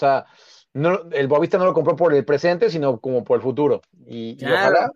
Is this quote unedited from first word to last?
yes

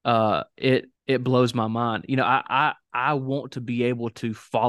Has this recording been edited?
yes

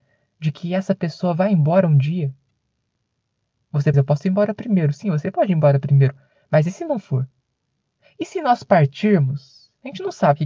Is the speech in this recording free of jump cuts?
no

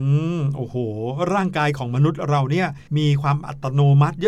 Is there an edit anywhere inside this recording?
yes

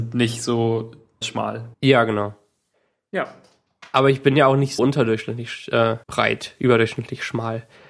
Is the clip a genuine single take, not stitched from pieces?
no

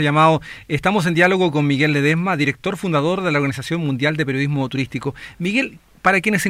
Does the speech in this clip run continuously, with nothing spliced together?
yes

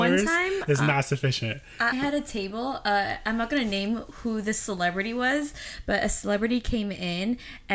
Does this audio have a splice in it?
yes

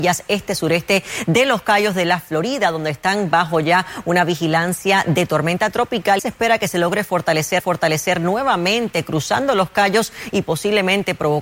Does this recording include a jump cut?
yes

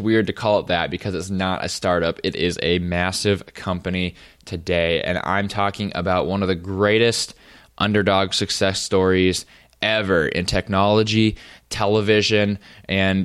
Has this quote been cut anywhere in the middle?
no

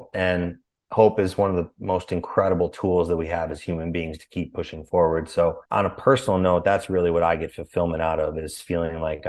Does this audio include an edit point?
yes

